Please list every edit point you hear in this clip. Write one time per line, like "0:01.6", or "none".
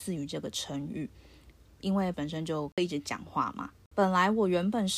0:02.1